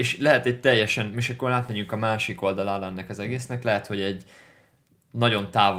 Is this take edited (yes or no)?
no